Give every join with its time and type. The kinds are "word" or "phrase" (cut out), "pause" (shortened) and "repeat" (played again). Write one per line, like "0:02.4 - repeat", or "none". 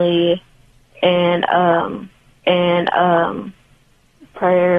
0:02.4 - repeat